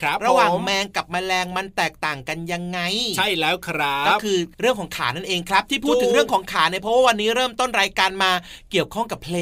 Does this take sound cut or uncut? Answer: cut